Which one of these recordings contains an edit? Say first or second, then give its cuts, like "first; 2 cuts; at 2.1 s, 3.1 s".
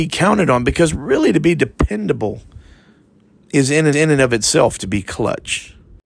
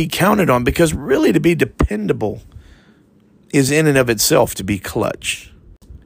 first; 1 cut; at 3.9 s